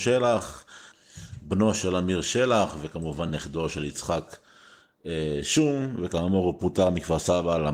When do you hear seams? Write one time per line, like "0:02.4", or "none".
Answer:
none